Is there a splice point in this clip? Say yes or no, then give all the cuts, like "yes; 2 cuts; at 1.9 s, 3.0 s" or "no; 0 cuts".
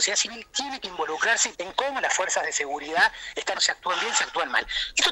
yes; 2 cuts; at 1.5 s, 3.5 s